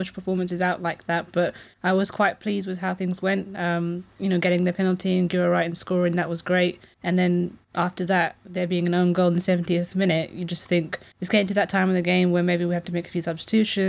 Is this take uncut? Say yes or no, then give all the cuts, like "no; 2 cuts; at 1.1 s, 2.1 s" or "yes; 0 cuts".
yes; 0 cuts